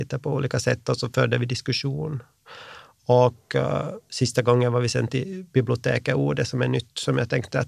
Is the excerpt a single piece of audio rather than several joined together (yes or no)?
yes